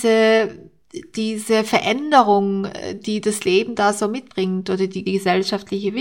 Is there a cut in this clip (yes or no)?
yes